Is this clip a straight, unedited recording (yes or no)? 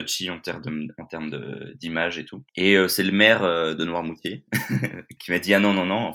no